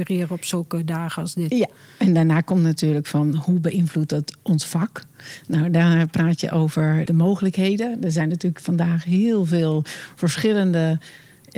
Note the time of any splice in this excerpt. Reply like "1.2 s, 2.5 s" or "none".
7.1 s